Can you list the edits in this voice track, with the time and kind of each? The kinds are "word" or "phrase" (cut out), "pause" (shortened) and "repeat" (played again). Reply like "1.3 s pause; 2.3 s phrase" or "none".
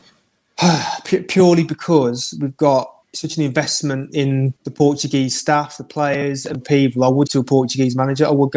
3.0 s pause; 4.6 s pause; 6.6 s word; 7.3 s word